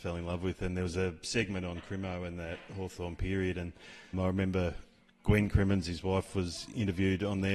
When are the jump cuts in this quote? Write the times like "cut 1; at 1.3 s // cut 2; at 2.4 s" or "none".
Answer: cut 1; at 4.1 s